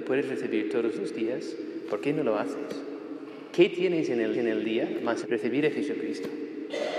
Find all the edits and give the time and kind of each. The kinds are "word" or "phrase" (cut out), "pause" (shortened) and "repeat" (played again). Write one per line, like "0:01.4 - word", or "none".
0:04.3 - repeat
0:05.2 - phrase